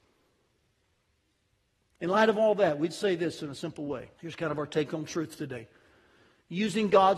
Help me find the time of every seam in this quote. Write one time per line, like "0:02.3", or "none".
0:04.2